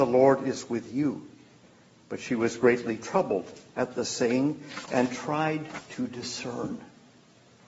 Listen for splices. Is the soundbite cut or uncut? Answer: uncut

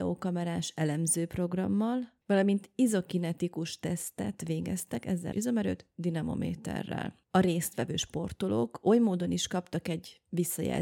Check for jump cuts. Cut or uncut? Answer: cut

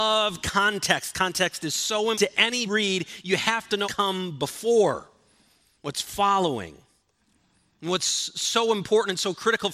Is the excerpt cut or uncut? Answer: cut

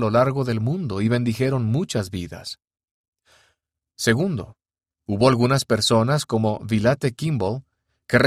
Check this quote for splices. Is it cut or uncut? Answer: uncut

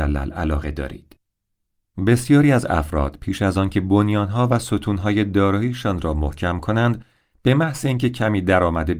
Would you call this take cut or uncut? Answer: uncut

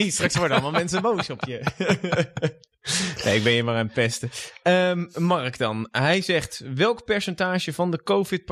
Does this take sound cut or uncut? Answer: uncut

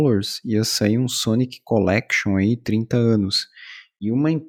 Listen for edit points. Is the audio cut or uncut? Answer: uncut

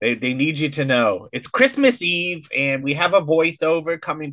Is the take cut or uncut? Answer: uncut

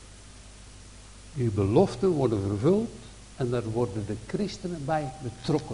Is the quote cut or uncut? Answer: uncut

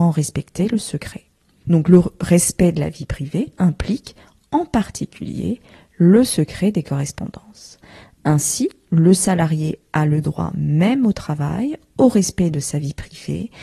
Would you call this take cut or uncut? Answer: uncut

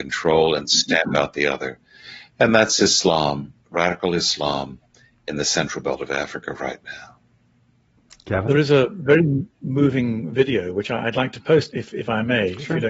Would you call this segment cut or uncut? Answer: cut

